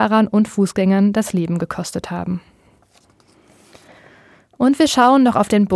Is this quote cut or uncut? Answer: uncut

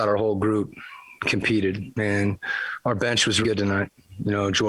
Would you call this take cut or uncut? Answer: cut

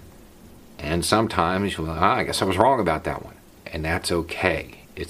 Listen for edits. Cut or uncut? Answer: uncut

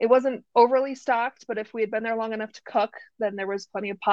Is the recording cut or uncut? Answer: uncut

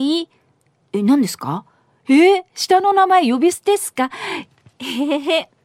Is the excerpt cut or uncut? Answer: uncut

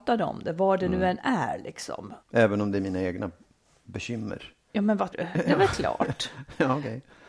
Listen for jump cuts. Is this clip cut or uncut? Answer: cut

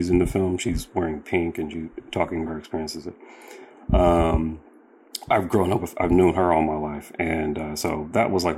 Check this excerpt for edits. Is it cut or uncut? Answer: cut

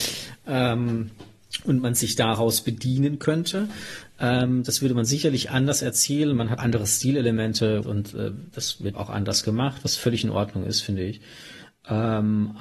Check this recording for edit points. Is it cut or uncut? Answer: cut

